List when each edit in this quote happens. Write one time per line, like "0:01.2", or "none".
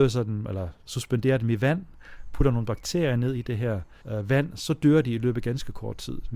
0:04.0